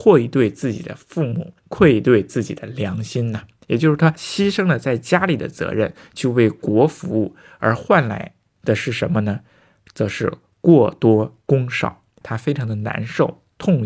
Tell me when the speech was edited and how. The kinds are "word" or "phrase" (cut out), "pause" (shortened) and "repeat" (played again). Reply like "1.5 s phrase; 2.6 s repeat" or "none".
1.6 s pause; 12.2 s phrase